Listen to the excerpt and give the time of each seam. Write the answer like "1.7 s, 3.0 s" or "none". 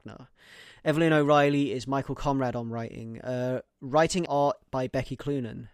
4.3 s